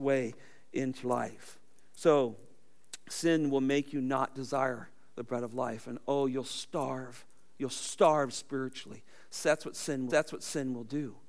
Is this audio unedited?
no; 2 cuts; at 1.0 s, 10.1 s

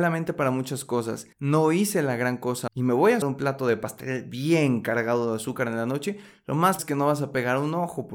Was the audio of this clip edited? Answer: yes; 4 cuts; at 1.3 s, 2.7 s, 3.2 s, 6.8 s

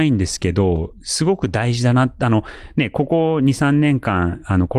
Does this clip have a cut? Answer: no; 0 cuts

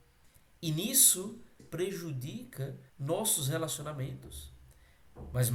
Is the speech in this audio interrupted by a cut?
yes; 2 cuts; at 1.6 s, 2.9 s

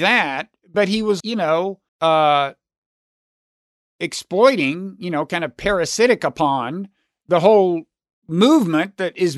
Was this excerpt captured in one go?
no; 2 cuts; at 1.2 s, 1.9 s

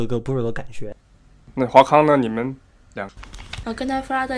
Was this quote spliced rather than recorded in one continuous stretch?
yes; 1 cut; at 1.5 s

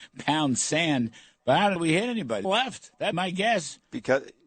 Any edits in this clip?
yes; 3 cuts; at 1.8 s, 2.4 s, 3.1 s

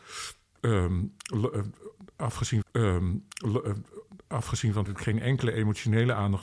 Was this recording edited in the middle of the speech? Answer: yes; 2 cuts; at 2.6 s, 4.9 s

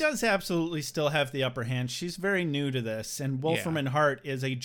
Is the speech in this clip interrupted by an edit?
no; 0 cuts

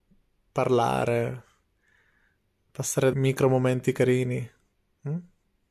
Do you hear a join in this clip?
yes; 1 cut; at 3.1 s

